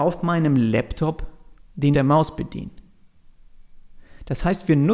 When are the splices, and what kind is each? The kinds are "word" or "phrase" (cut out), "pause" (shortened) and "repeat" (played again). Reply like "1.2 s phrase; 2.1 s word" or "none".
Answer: 1.9 s phrase